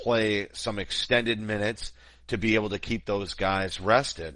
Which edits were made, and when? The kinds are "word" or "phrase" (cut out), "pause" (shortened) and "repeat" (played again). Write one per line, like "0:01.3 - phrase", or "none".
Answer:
none